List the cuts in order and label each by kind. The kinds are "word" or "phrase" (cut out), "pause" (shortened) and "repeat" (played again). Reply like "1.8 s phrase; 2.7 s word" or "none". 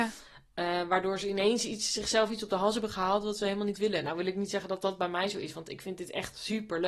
none